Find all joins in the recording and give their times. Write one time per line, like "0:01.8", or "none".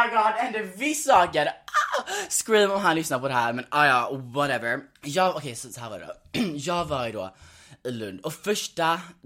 0:05.0